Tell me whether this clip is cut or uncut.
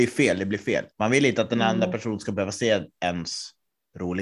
cut